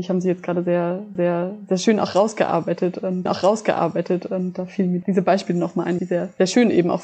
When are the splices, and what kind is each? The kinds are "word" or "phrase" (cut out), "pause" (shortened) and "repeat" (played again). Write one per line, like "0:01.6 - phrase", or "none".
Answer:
0:01.2 - repeat
0:03.3 - repeat
0:05.0 - word
0:06.0 - phrase

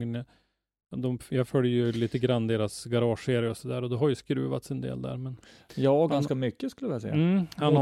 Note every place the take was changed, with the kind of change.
none

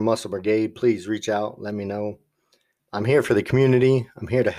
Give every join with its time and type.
0:02.8 - word

